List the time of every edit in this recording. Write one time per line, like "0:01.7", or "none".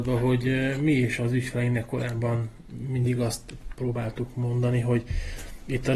none